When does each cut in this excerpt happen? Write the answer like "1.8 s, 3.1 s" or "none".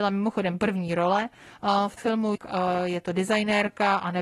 2.0 s, 2.3 s